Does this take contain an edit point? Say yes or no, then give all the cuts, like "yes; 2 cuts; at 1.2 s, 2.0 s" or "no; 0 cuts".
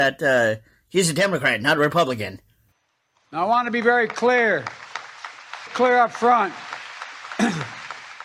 yes; 1 cut; at 5.7 s